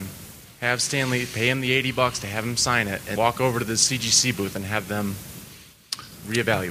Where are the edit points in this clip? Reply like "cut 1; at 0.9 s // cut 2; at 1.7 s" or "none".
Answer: cut 1; at 3.2 s